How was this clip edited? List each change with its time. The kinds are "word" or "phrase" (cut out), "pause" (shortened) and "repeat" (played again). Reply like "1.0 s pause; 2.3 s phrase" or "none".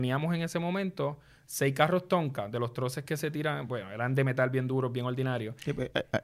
none